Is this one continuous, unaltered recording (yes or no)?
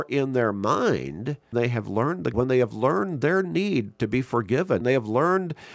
no